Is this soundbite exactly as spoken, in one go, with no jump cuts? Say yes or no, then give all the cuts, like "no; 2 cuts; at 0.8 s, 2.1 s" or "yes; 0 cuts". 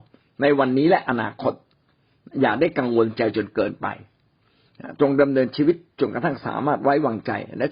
yes; 0 cuts